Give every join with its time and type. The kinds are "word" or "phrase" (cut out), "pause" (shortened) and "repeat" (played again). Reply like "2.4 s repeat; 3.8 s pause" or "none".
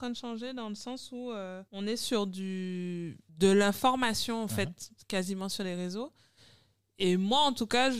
1.7 s pause; 3.3 s pause